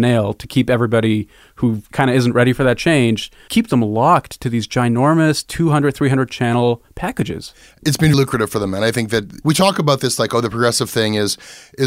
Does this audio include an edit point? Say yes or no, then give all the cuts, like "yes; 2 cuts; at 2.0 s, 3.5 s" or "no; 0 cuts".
yes; 2 cuts; at 3.5 s, 8.1 s